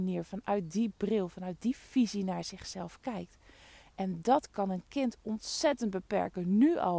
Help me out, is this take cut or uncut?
uncut